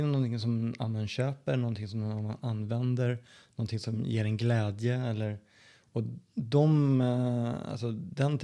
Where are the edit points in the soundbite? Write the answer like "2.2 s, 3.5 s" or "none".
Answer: none